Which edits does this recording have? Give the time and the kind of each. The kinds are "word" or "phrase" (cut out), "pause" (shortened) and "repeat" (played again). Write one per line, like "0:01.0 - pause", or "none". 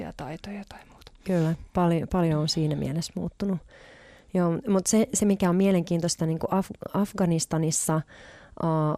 none